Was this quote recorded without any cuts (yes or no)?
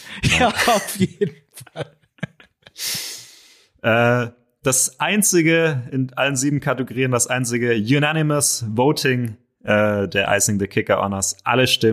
yes